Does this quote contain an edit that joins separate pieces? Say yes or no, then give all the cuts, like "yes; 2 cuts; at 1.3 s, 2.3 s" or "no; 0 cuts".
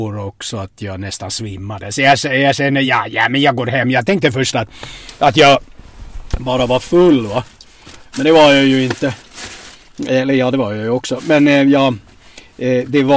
no; 0 cuts